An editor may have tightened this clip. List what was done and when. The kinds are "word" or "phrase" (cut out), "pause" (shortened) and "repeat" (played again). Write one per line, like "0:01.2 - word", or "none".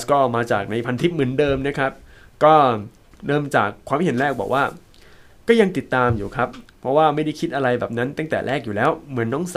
0:03.1 - pause